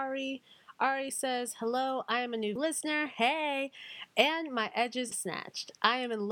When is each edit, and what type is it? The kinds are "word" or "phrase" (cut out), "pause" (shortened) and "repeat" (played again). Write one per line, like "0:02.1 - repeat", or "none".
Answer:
0:02.6 - word
0:05.1 - word